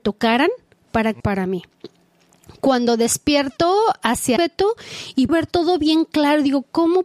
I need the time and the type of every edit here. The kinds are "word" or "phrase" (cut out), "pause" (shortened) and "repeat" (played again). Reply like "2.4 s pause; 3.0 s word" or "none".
1.2 s word; 4.4 s word; 5.3 s word